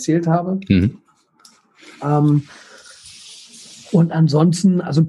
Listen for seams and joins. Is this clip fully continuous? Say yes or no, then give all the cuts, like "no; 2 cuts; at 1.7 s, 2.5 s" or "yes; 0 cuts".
yes; 0 cuts